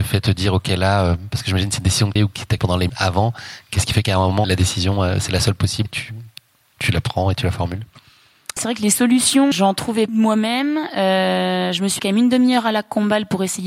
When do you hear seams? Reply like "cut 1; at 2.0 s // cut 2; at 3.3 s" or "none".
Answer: cut 1; at 2.2 s // cut 2; at 2.6 s // cut 3; at 2.9 s // cut 4; at 4.4 s // cut 5; at 5.8 s // cut 6; at 8.6 s // cut 7; at 9.5 s // cut 8; at 10.1 s // cut 9; at 12.0 s